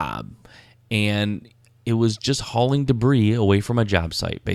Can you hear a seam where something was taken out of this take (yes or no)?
no